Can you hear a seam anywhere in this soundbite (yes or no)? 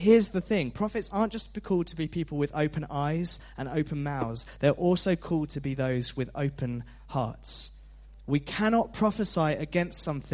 no